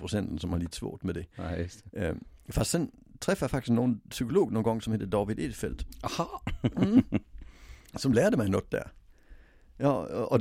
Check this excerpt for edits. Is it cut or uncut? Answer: uncut